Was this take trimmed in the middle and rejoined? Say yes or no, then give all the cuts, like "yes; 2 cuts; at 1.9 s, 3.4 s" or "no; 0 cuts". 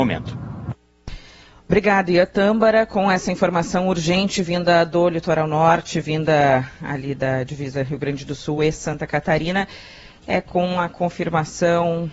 no; 0 cuts